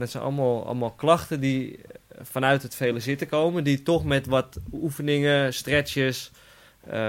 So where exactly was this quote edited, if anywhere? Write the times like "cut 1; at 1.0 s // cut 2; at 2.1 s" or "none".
none